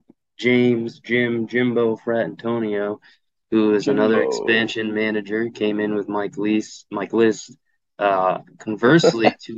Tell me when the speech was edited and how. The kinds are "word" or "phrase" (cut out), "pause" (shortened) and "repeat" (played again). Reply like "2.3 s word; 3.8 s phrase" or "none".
none